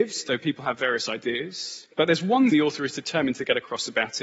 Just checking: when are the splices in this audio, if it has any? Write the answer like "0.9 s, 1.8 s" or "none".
1.9 s, 2.5 s